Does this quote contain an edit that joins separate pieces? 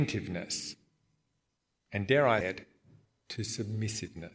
yes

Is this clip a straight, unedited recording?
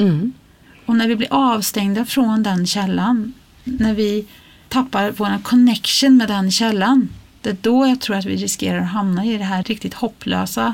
yes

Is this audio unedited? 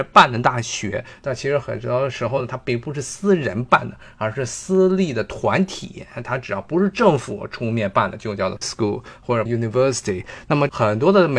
no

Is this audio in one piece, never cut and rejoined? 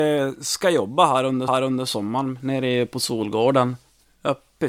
no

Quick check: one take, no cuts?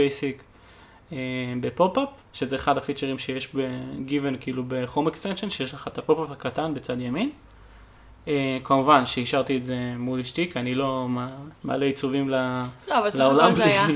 no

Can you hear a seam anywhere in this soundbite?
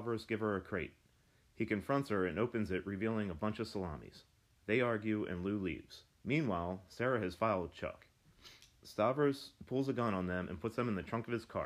yes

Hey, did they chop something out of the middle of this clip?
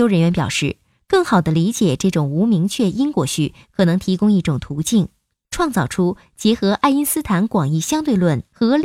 no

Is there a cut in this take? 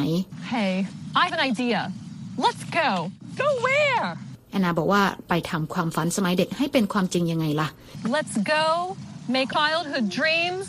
yes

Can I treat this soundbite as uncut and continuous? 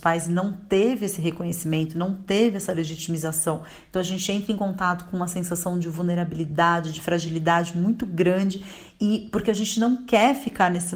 yes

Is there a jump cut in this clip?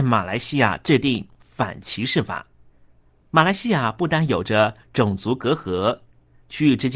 yes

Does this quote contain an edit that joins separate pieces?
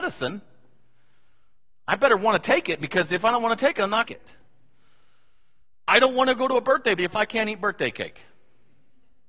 yes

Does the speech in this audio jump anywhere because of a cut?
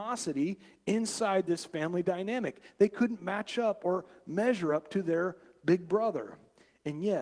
no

